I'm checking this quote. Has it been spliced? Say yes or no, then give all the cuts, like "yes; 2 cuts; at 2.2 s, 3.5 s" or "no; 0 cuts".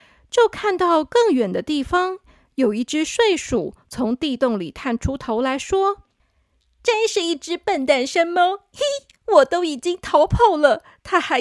no; 0 cuts